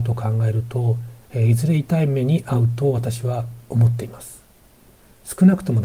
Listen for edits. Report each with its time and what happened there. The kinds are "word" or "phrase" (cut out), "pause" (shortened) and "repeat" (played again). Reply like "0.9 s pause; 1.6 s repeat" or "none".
1.2 s pause

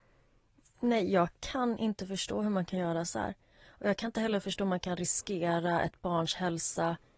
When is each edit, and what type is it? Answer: none

